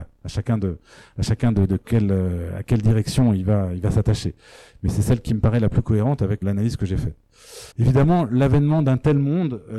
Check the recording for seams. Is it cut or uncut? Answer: cut